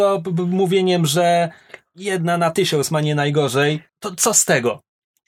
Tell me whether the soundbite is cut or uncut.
cut